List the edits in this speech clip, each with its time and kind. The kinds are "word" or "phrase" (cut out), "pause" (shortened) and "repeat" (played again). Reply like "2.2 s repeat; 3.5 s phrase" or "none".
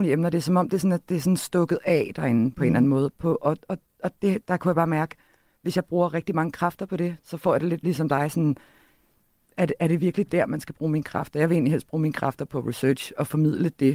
none